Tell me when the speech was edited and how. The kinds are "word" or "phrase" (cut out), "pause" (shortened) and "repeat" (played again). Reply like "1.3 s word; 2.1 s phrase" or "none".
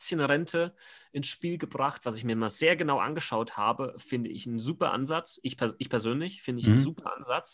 none